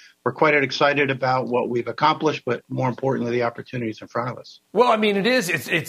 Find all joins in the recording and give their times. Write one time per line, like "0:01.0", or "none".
0:04.6